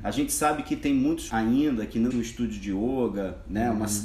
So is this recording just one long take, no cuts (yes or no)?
no